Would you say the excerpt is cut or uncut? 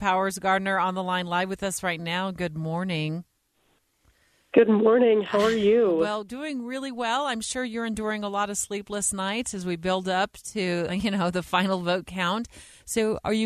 cut